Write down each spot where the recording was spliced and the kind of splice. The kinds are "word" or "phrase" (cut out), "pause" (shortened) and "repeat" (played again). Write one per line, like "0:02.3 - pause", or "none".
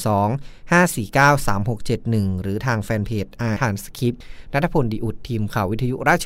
0:03.6 - phrase